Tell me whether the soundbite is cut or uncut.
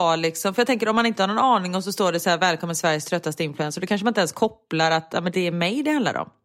uncut